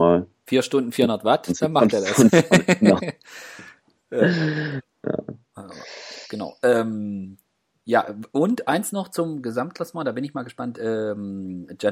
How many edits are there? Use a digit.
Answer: 0